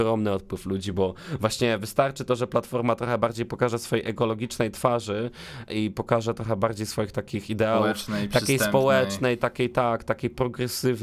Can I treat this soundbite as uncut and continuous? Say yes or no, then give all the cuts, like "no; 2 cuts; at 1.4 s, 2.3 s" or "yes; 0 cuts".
no; 1 cut; at 5.7 s